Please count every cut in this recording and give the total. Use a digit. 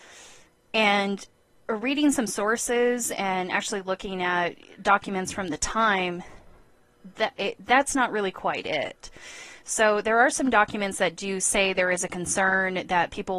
0